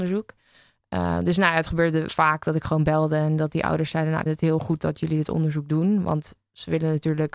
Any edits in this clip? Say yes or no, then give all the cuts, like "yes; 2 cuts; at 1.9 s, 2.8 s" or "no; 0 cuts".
yes; 2 cuts; at 2.1 s, 4.3 s